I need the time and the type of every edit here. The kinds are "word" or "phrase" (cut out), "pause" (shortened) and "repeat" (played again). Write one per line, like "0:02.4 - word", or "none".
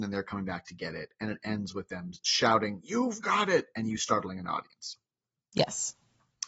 none